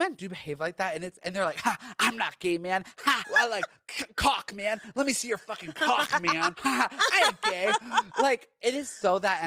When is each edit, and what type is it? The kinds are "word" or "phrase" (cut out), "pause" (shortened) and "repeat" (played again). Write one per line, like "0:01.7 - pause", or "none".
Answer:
0:03.2 - phrase
0:06.5 - word